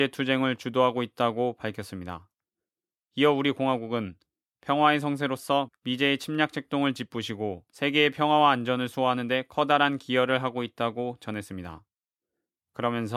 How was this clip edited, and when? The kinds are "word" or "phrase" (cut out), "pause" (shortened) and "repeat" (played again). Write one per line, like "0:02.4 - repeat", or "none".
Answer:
0:07.7 - pause